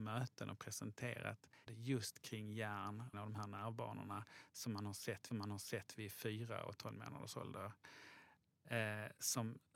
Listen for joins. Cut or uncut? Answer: cut